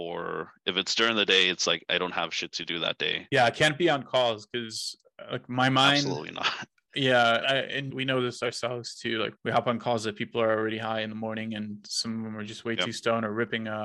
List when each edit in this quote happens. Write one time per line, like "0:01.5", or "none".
0:07.4